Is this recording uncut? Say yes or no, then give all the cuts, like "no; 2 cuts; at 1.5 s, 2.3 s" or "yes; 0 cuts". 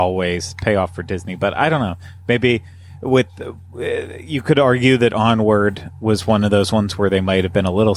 yes; 0 cuts